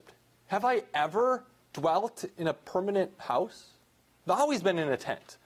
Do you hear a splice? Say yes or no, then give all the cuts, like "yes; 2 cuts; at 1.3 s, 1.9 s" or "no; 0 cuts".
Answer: no; 0 cuts